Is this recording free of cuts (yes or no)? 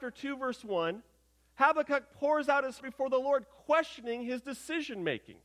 no